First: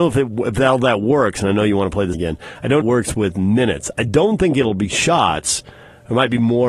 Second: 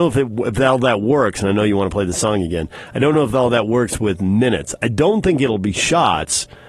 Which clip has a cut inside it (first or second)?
first